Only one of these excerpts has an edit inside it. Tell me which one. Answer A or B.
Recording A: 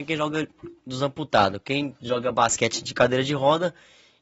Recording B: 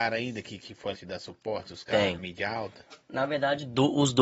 B